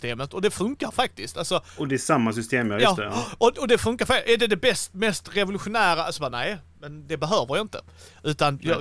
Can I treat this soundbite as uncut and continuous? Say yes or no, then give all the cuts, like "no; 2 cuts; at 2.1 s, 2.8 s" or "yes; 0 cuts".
yes; 0 cuts